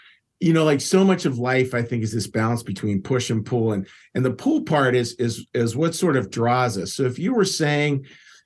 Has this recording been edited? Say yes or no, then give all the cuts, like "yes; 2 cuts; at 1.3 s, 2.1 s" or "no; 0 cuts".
no; 0 cuts